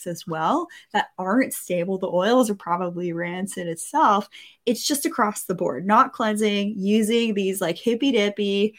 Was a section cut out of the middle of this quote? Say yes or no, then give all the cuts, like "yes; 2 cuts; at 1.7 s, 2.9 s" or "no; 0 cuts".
no; 0 cuts